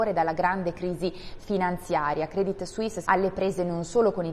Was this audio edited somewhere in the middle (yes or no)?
yes